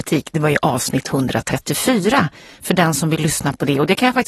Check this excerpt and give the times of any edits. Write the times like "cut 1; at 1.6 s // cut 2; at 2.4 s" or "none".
none

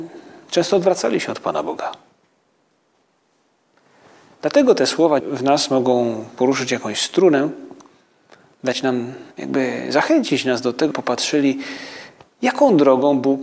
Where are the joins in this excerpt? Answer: cut 1; at 5.2 s // cut 2; at 9.3 s // cut 3; at 10.9 s

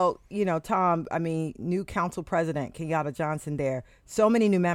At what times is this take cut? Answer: none

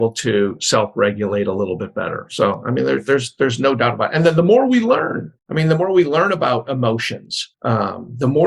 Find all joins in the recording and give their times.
cut 1; at 5.4 s // cut 2; at 7.5 s

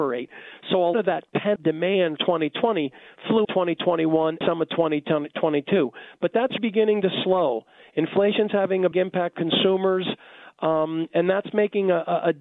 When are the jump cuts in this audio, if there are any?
cut 1; at 0.9 s // cut 2; at 1.6 s // cut 3; at 2.2 s // cut 4; at 3.4 s // cut 5; at 4.4 s // cut 6; at 6.6 s // cut 7; at 8.9 s // cut 8; at 9.3 s

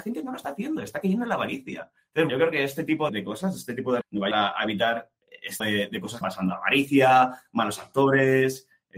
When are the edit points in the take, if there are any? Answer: cut 1; at 2.3 s // cut 2; at 3.1 s // cut 3; at 4.0 s // cut 4; at 4.3 s // cut 5; at 5.6 s // cut 6; at 6.2 s

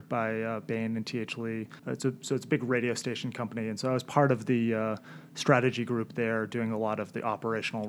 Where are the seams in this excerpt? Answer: cut 1; at 1.8 s

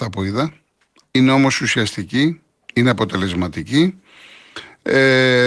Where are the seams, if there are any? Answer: none

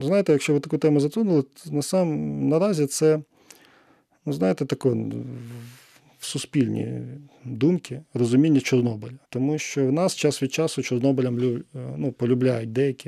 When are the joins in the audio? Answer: cut 1; at 9.2 s

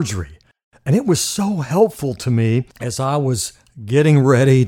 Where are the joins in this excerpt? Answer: cut 1; at 2.7 s

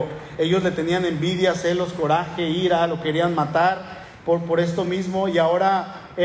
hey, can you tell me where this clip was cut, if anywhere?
none

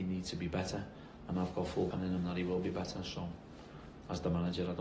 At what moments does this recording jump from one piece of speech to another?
cut 1; at 1.9 s

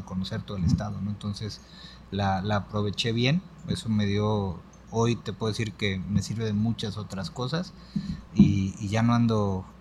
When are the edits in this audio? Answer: none

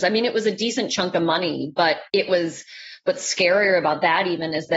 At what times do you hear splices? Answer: cut 1; at 2.1 s

